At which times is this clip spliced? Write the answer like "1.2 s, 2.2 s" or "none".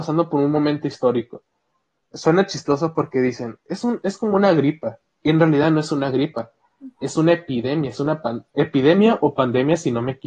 none